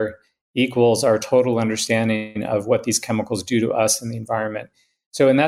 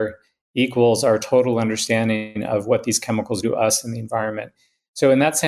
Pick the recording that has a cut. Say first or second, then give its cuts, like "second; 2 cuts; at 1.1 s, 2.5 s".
second; 1 cut; at 3.4 s